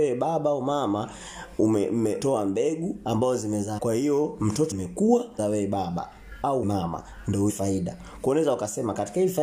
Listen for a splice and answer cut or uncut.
cut